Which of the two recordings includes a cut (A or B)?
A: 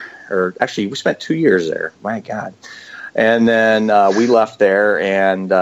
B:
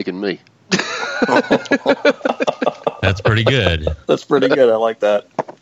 A